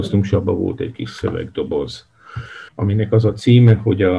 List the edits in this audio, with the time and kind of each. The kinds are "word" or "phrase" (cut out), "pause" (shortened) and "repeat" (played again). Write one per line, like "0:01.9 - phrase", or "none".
0:02.7 - pause

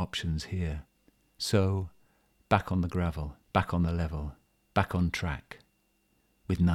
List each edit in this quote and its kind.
0:01.0 - pause
0:03.4 - pause
0:04.5 - pause

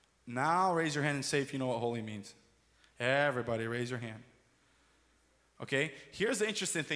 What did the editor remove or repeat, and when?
none

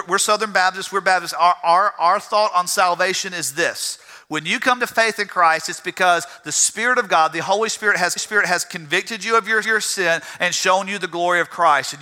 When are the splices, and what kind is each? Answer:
0:08.2 - repeat
0:09.6 - repeat

